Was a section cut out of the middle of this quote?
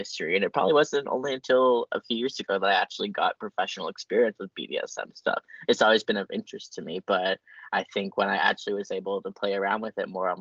no; 0 cuts

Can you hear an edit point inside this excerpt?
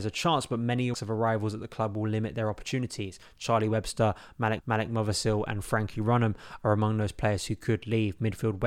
yes; 2 cuts; at 0.9 s, 4.6 s

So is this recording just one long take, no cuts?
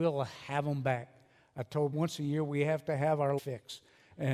no; 2 cuts; at 1.9 s, 3.4 s

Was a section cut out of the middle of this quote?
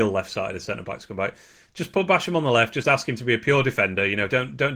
no; 0 cuts

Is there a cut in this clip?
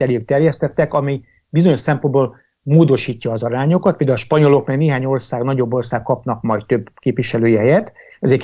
no; 0 cuts

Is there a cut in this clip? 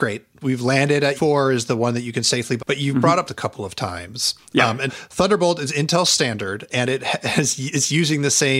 yes; 4 cuts; at 1.1 s, 2.6 s, 3.3 s, 4.9 s

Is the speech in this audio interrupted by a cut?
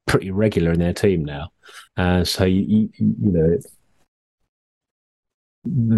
yes; 1 cut; at 1.9 s

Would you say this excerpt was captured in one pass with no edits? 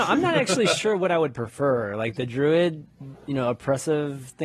yes; 0 cuts

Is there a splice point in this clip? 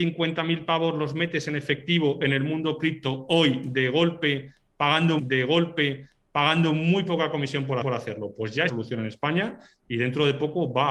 yes; 3 cuts; at 5.2 s, 7.8 s, 8.7 s

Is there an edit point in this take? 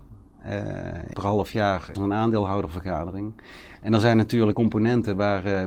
yes; 3 cuts; at 1.1 s, 2.0 s, 4.5 s

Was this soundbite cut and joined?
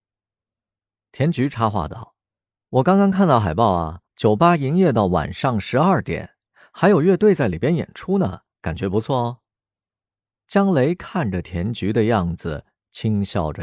yes; 4 cuts; at 2.2 s, 4.1 s, 8.5 s, 9.5 s

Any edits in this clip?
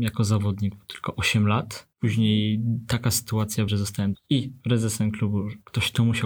yes; 3 cuts; at 1.9 s, 3.7 s, 4.1 s

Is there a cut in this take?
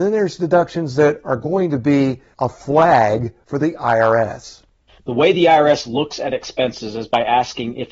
no; 0 cuts

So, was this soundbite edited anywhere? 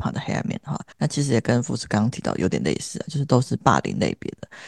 yes; 1 cut; at 0.9 s

